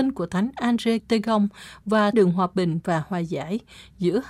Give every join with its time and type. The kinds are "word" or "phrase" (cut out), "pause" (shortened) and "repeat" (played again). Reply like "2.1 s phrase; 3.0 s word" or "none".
1.0 s word; 2.1 s phrase